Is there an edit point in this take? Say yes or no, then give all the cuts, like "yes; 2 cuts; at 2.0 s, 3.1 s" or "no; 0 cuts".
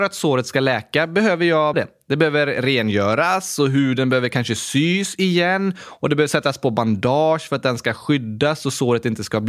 yes; 1 cut; at 1.7 s